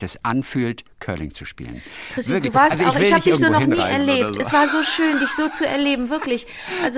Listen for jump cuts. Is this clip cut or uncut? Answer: uncut